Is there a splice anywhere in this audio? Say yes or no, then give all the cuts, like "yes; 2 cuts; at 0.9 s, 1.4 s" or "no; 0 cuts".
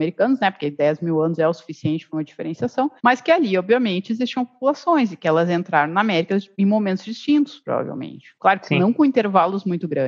yes; 1 cut; at 3.0 s